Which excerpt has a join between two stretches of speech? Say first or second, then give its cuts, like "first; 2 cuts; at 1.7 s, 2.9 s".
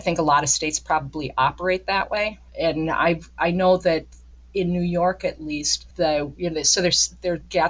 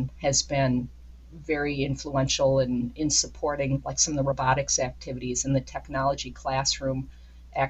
first; 1 cut; at 2.5 s